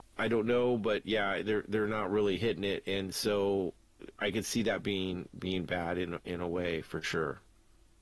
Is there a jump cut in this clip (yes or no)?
no